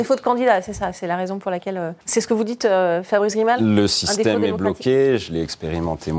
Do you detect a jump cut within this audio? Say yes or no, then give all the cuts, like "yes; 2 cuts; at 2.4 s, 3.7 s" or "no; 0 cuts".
yes; 1 cut; at 2.0 s